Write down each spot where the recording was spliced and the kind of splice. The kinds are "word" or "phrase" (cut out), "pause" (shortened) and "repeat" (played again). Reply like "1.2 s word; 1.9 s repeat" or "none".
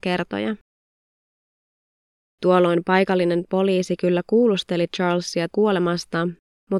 5.5 s word